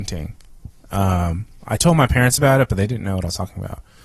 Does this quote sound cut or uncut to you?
uncut